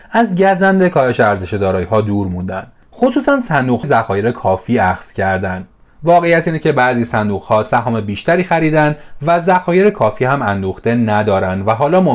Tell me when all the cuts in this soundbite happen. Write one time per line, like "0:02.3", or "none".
0:03.8